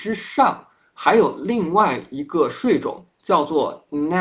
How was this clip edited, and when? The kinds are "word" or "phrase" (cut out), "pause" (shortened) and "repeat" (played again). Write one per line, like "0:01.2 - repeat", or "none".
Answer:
0:03.1 - pause